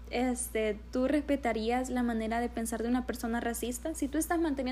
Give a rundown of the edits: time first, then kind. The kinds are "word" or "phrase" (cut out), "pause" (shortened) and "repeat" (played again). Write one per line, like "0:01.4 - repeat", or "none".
none